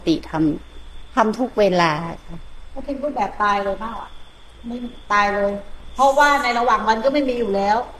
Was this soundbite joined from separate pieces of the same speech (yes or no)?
no